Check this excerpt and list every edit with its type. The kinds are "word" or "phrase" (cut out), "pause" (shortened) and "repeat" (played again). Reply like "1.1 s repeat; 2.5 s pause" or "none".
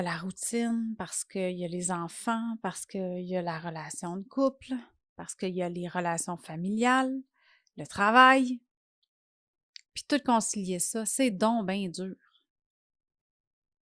none